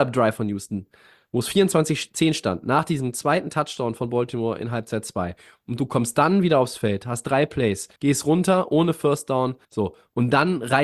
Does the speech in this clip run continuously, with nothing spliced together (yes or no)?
no